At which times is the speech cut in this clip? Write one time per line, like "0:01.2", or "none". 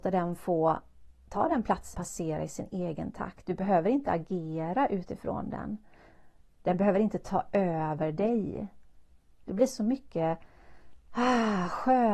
0:01.9
0:06.4